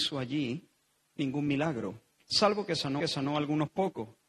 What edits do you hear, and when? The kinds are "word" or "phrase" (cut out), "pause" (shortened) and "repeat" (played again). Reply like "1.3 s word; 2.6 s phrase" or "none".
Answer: 3.0 s repeat